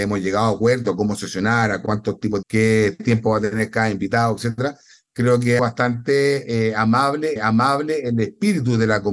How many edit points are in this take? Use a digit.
3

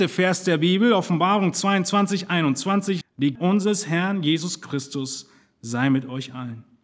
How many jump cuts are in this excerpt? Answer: 2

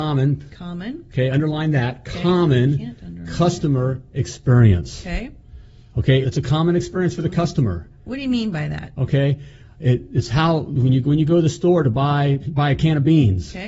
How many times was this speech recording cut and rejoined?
2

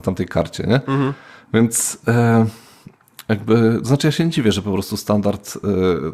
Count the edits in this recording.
0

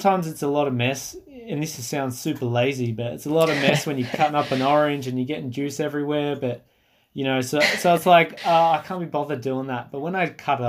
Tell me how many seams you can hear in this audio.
0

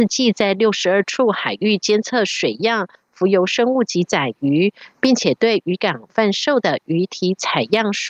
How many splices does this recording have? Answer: 0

